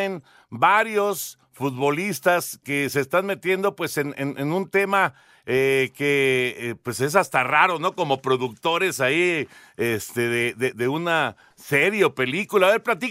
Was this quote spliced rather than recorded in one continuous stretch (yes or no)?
yes